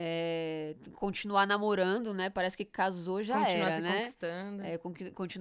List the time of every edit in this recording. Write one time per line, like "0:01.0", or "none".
none